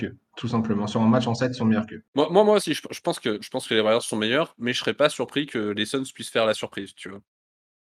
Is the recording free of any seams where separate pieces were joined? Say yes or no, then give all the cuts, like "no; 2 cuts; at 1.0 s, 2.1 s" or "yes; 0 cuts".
yes; 0 cuts